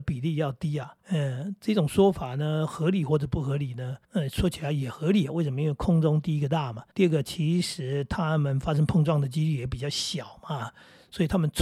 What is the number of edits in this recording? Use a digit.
3